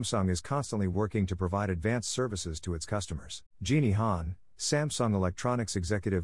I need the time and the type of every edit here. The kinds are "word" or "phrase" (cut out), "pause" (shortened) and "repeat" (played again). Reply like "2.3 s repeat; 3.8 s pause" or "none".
3.5 s pause